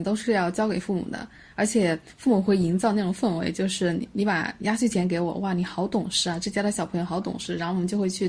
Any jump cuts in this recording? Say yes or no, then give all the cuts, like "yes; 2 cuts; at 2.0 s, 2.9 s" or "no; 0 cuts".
no; 0 cuts